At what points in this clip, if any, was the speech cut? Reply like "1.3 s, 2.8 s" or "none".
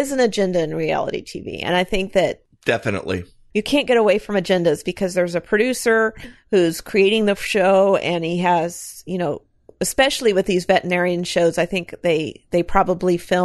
none